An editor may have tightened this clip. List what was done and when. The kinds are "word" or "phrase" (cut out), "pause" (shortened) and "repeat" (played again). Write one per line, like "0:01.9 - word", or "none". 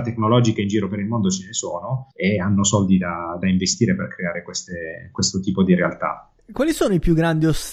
0:02.1 - pause